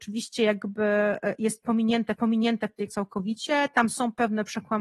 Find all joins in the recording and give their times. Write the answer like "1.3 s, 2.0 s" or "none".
2.2 s, 2.9 s

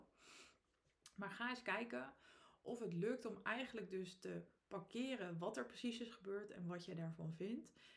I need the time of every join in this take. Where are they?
none

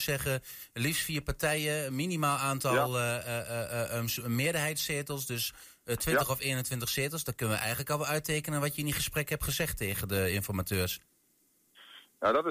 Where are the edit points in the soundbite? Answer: none

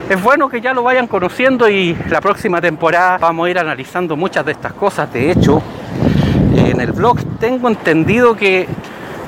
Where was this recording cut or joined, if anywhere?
none

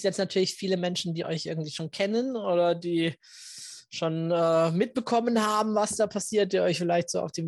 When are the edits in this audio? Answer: none

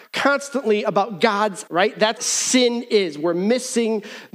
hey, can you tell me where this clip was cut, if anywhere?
1.7 s, 2.2 s

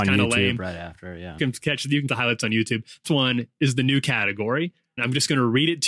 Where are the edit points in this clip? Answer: 1.4 s, 2.1 s, 3.0 s, 5.0 s

